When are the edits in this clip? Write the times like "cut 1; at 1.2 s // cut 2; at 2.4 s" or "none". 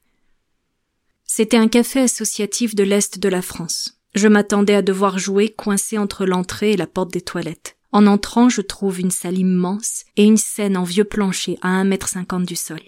cut 1; at 4.0 s // cut 2; at 7.8 s // cut 3; at 10.1 s